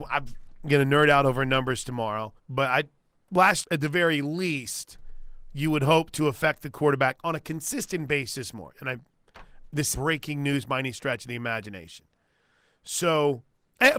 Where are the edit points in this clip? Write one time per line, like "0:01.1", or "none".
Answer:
0:02.4
0:03.6
0:09.9